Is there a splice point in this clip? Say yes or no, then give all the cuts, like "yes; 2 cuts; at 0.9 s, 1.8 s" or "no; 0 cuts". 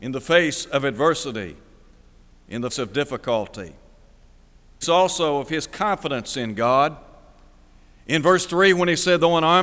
yes; 2 cuts; at 2.7 s, 4.8 s